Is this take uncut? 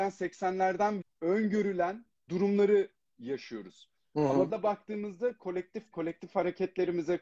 no; 4 cuts; at 1.0 s, 2.3 s, 4.5 s, 5.9 s

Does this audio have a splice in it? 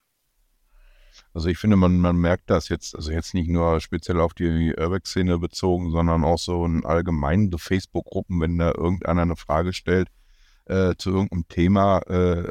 no; 0 cuts

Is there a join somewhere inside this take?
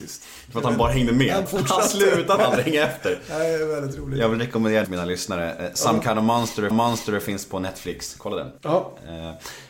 yes; 5 cuts; at 1.5 s, 2.4 s, 4.8 s, 6.7 s, 8.6 s

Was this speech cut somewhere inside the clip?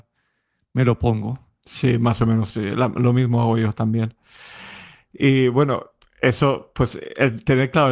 no; 0 cuts

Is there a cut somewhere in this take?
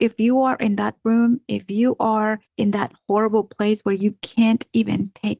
yes; 2 cuts; at 1.0 s, 2.5 s

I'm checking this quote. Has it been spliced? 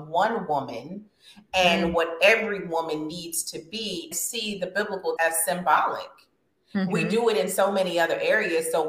yes; 2 cuts; at 4.1 s, 5.2 s

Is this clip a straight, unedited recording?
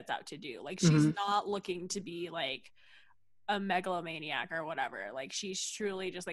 yes; 0 cuts

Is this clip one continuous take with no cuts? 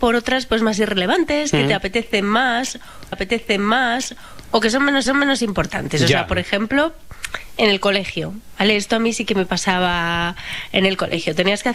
no; 2 cuts; at 3.1 s, 5.1 s

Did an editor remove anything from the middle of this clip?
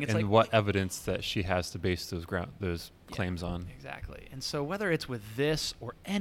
no; 0 cuts

